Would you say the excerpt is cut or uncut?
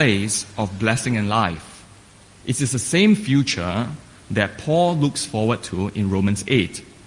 uncut